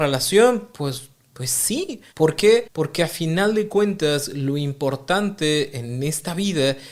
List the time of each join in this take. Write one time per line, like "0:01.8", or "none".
0:02.1